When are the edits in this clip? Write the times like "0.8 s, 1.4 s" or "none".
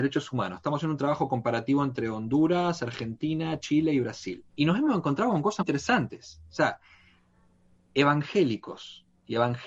4.5 s, 5.6 s